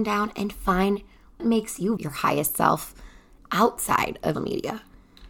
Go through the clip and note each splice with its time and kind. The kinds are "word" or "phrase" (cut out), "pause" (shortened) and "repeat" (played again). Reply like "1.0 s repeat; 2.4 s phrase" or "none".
1.4 s word; 2.0 s word; 4.3 s word

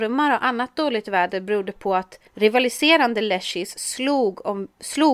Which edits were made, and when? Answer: 2.3 s pause

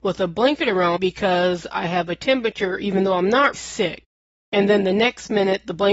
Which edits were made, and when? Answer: 1.0 s word; 3.5 s word

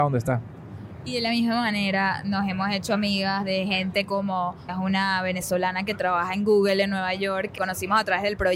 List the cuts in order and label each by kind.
4.7 s phrase; 7.6 s word

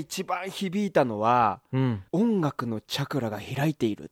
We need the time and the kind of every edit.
2.1 s pause

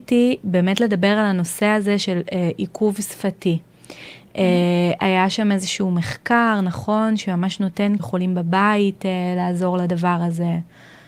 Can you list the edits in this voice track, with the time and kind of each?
8.0 s phrase

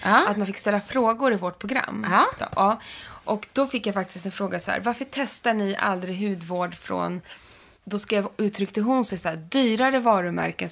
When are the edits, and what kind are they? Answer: none

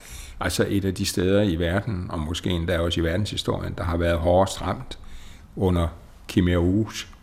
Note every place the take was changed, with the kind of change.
none

